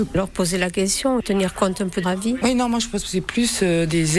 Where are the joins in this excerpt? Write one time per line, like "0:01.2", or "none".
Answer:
0:02.0